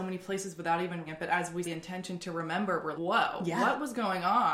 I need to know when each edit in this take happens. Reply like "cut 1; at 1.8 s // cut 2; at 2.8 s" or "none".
cut 1; at 1.1 s // cut 2; at 1.6 s // cut 3; at 2.9 s